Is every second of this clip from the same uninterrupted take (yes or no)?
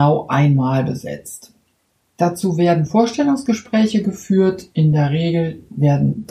yes